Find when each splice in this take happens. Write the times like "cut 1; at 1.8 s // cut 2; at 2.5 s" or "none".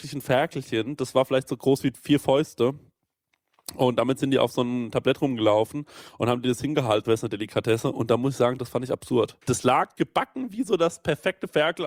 cut 1; at 4.9 s // cut 2; at 7.0 s // cut 3; at 9.4 s